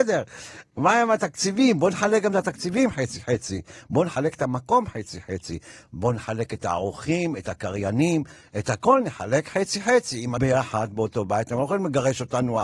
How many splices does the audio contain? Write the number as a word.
one